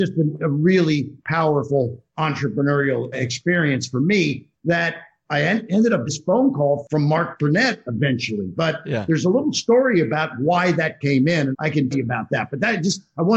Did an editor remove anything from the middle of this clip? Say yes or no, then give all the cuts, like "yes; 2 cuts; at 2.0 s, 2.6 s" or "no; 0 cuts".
yes; 6 cuts; at 3.1 s, 4.5 s, 6.1 s, 11.0 s, 11.5 s, 11.9 s